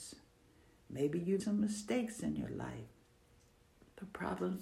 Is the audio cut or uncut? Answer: cut